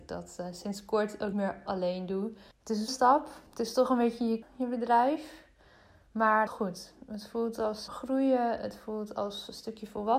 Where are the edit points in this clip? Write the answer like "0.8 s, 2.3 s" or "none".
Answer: 1.3 s, 1.7 s, 2.5 s, 2.9 s, 3.5 s, 4.4 s, 6.5 s, 7.9 s